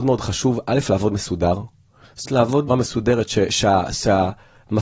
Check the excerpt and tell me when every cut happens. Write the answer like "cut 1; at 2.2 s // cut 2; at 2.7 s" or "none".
cut 1; at 1.1 s // cut 2; at 2.3 s // cut 3; at 2.7 s